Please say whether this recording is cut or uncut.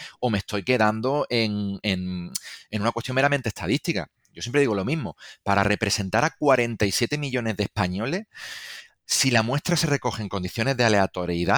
uncut